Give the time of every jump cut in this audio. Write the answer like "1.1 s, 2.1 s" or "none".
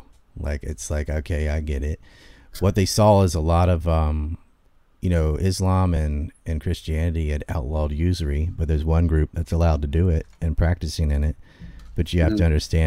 none